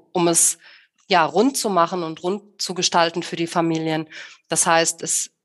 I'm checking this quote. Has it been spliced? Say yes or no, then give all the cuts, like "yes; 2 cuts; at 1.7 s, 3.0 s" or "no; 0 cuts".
no; 0 cuts